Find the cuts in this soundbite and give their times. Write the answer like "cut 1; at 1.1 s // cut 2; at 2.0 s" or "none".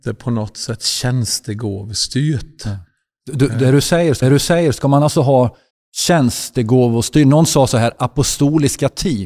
cut 1; at 4.2 s // cut 2; at 5.7 s